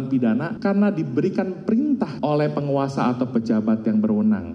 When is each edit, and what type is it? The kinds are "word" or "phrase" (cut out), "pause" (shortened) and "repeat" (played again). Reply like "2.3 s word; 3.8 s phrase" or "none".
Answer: 2.2 s word